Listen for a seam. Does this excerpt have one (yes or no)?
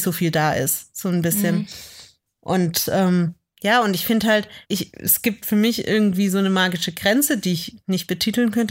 yes